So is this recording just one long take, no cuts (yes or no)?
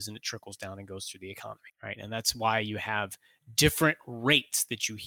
no